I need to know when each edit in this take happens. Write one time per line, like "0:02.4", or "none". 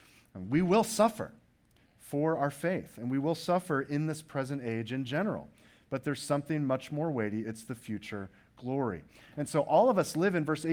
none